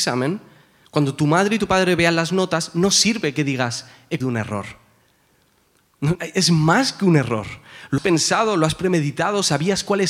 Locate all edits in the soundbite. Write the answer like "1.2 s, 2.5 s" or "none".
4.2 s, 6.2 s, 8.0 s